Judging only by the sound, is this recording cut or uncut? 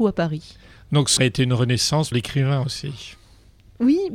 cut